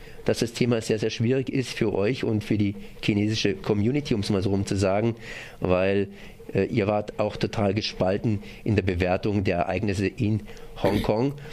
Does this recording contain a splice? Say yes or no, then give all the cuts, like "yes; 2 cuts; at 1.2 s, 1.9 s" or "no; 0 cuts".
no; 0 cuts